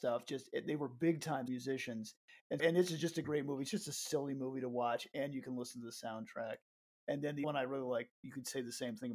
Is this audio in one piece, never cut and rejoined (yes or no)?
no